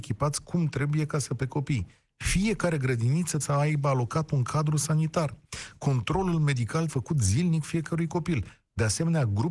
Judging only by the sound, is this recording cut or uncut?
cut